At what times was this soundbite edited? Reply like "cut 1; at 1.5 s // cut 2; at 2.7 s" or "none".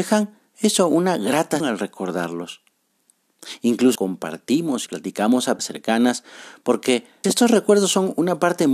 cut 1; at 1.6 s // cut 2; at 3.9 s // cut 3; at 4.9 s // cut 4; at 5.6 s // cut 5; at 7.2 s